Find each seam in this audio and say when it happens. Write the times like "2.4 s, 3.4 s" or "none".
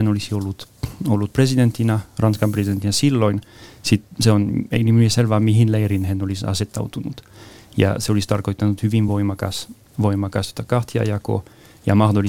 none